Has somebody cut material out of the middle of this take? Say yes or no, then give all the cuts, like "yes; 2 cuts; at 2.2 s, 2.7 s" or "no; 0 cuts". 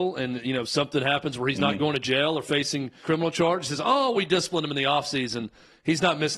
yes; 2 cuts; at 3.0 s, 4.1 s